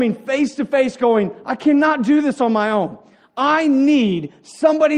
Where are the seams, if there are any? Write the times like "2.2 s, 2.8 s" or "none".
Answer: none